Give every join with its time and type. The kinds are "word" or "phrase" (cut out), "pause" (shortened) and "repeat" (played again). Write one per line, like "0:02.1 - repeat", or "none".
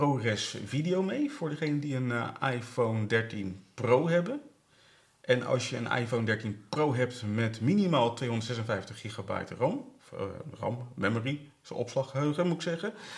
none